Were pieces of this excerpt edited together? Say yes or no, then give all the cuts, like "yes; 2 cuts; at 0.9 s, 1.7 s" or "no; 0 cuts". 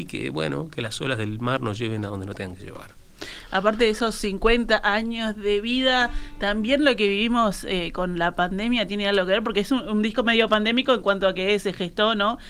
no; 0 cuts